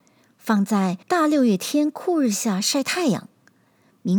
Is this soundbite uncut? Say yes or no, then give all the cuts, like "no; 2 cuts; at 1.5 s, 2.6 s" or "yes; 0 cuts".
no; 1 cut; at 1.0 s